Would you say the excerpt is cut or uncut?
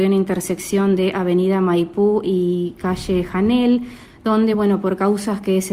uncut